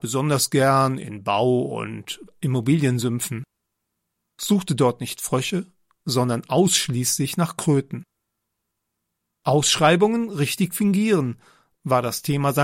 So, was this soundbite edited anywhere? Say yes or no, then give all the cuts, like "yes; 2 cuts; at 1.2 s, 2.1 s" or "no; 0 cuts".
no; 0 cuts